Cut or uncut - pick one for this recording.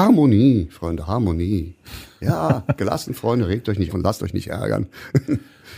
cut